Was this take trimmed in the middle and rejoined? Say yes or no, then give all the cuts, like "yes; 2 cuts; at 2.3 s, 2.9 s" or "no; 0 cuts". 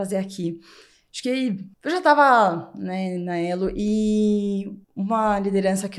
yes; 2 cuts; at 1.7 s, 4.8 s